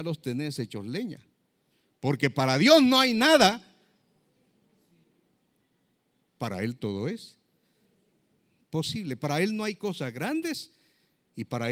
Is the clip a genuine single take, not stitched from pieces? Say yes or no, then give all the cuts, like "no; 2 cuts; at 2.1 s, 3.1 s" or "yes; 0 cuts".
yes; 0 cuts